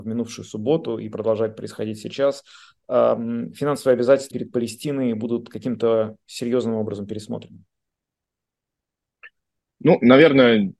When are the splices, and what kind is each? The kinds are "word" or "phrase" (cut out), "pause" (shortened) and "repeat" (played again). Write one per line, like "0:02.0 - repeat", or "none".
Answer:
0:04.3 - word